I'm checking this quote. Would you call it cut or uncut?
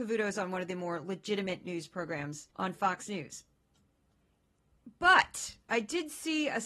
cut